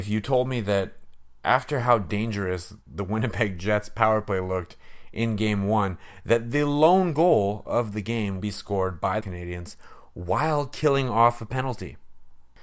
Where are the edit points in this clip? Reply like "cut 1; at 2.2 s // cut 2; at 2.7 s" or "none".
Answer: cut 1; at 2.8 s // cut 2; at 8.4 s // cut 3; at 9.2 s